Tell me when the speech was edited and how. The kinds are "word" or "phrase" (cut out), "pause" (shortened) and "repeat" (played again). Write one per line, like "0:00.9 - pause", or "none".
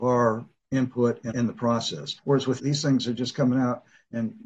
0:01.3 - phrase
0:02.2 - pause
0:02.6 - word